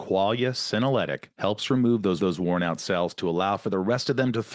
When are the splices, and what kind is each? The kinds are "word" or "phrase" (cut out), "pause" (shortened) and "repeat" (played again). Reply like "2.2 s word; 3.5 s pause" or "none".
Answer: 1.3 s pause; 2.2 s repeat; 2.8 s word